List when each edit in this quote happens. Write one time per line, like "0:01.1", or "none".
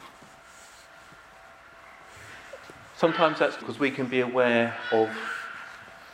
0:03.6